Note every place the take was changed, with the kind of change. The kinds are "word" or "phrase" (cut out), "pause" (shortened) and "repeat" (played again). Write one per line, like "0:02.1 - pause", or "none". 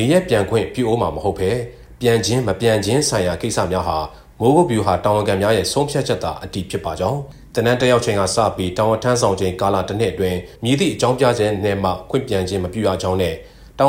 0:10.6 - pause